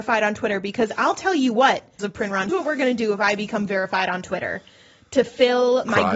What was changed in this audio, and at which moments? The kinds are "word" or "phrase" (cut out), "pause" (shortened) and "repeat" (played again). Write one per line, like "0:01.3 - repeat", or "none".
0:02.0 - word
0:02.5 - word